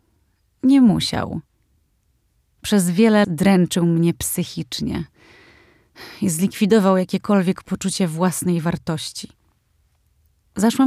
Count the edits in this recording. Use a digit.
1